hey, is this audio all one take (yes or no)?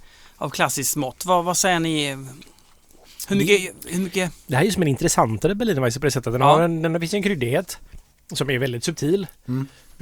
yes